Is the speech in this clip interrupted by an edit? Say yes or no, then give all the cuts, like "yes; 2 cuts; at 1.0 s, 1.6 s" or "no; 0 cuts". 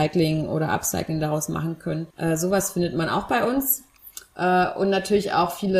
yes; 1 cut; at 2.1 s